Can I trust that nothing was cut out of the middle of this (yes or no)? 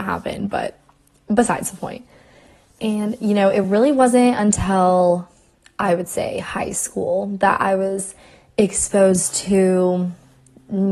yes